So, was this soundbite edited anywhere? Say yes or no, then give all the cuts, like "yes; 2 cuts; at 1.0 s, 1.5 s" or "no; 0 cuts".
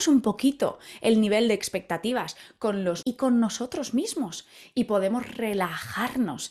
yes; 1 cut; at 3.0 s